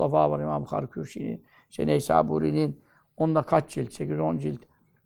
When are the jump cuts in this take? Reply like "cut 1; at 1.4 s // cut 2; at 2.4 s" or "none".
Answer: none